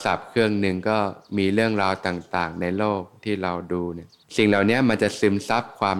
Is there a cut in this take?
yes; 1 cut; at 4.2 s

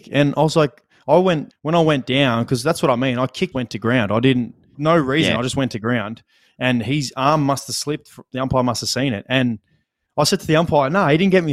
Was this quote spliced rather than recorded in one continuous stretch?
yes; 3 cuts; at 1.5 s, 3.5 s, 4.7 s

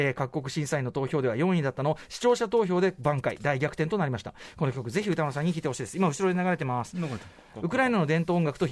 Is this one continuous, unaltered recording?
yes; 0 cuts

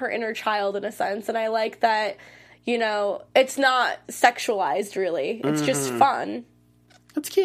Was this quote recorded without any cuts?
yes; 0 cuts

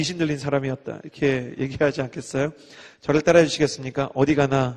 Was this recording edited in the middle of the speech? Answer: no; 0 cuts

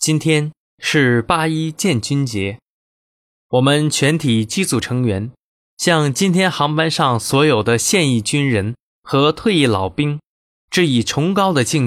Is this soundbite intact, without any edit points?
yes; 0 cuts

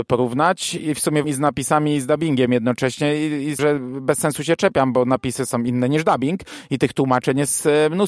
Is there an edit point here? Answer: yes; 2 cuts; at 1.2 s, 3.6 s

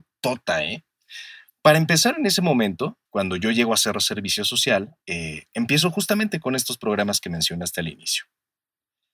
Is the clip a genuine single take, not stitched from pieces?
no; 3 cuts; at 1.5 s, 3.1 s, 5.0 s

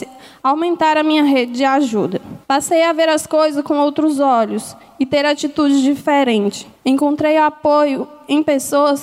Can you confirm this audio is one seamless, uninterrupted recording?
no; 2 cuts; at 2.4 s, 6.8 s

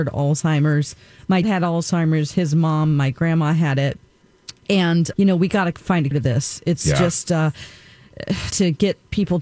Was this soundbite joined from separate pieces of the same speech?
yes; 4 cuts; at 1.4 s, 5.1 s, 6.1 s, 8.5 s

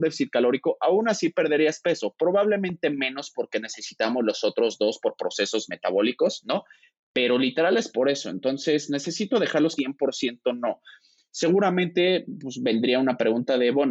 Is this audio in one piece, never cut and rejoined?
no; 1 cut; at 9.8 s

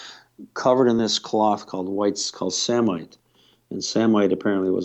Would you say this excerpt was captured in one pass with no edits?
yes; 0 cuts

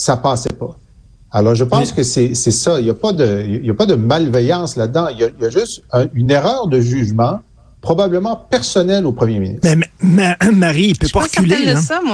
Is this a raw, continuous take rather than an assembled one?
yes; 0 cuts

